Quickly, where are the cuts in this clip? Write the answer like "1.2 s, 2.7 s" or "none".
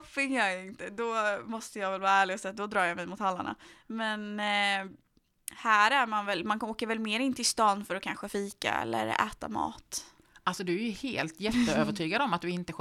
none

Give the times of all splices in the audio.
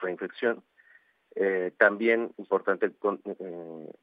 2.3 s

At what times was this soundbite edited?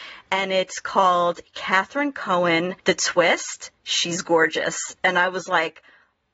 2.8 s

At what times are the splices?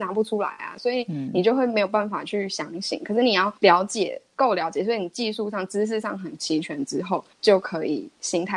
3.6 s, 7.3 s

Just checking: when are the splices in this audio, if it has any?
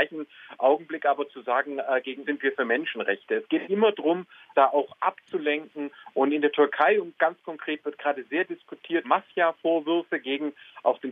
2.2 s, 3.6 s, 9.0 s

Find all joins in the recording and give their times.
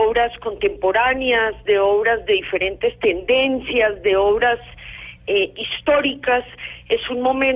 none

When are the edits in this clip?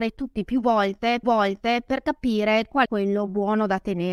1.2 s, 2.9 s

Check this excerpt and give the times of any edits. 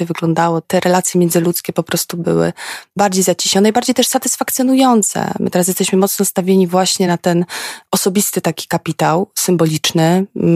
none

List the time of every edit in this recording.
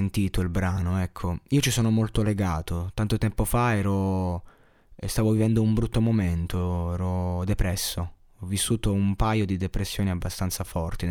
none

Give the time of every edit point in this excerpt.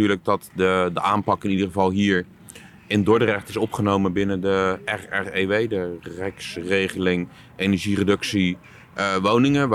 none

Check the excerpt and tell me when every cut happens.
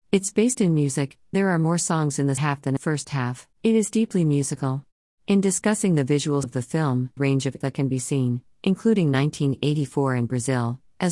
1.3 s, 2.4 s, 2.8 s, 3.5 s, 5.1 s, 6.4 s, 7.2 s, 7.6 s

